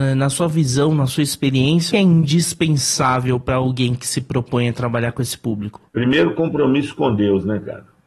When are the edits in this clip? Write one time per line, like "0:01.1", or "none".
0:01.9
0:05.9